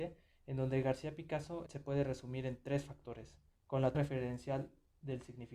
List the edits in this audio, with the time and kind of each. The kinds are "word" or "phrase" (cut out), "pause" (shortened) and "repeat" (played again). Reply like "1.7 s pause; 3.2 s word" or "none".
1.7 s phrase; 3.5 s pause; 3.9 s word